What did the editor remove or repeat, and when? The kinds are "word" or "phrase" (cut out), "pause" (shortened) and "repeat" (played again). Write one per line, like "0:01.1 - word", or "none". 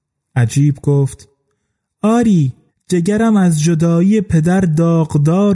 0:02.7 - pause